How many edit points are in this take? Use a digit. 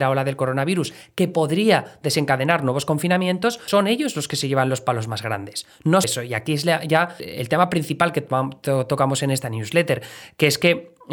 3